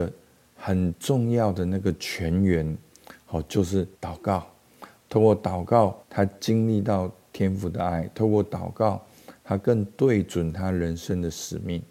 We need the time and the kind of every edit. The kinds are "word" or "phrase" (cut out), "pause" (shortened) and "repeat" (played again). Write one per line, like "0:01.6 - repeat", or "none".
0:03.9 - pause
0:06.0 - pause